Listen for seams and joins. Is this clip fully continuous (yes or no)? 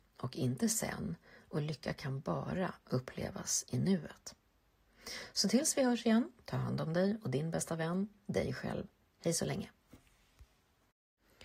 yes